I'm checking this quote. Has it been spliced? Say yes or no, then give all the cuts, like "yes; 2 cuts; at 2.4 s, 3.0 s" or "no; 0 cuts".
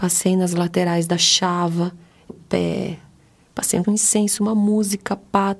yes; 2 cuts; at 2.3 s, 3.8 s